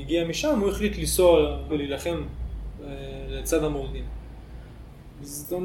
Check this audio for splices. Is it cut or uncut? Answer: cut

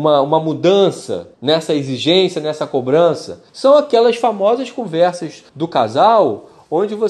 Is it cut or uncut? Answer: cut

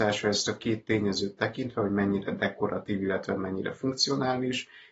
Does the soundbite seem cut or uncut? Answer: uncut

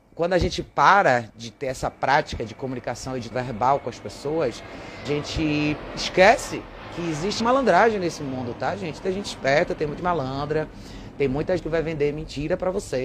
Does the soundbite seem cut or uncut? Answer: cut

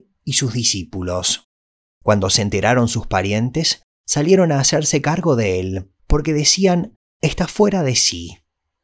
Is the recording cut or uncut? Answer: uncut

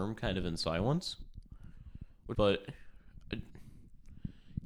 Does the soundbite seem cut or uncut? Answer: cut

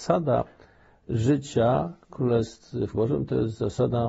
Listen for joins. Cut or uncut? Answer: cut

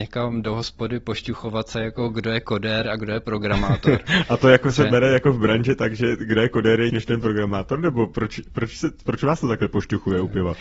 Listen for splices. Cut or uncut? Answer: cut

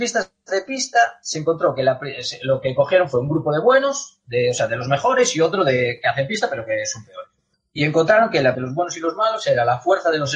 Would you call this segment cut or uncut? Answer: cut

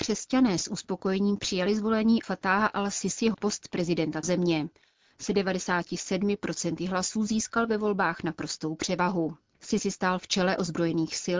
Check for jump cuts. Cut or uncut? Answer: cut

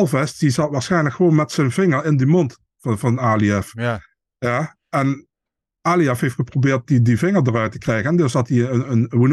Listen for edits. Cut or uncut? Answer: uncut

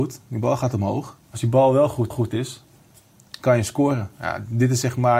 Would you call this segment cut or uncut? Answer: cut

